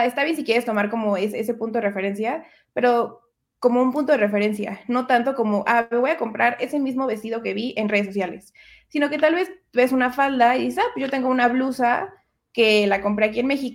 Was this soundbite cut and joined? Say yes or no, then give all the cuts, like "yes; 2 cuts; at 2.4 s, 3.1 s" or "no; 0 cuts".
no; 0 cuts